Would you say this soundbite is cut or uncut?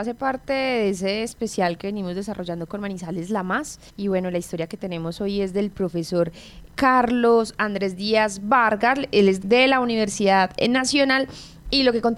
cut